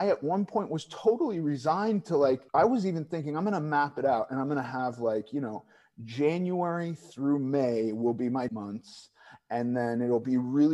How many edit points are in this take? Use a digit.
2